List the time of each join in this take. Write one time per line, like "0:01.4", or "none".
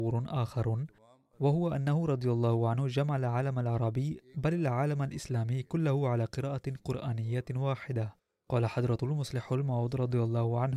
none

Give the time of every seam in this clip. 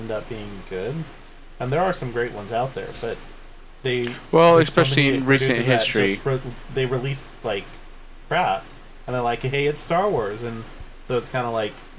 none

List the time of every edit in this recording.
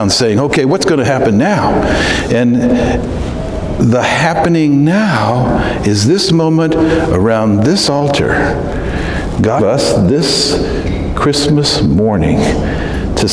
0:09.6

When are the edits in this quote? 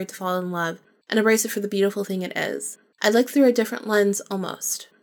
none

